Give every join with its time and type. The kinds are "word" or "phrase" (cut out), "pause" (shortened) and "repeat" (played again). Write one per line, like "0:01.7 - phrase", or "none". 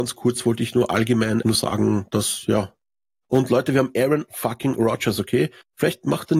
0:01.4 - word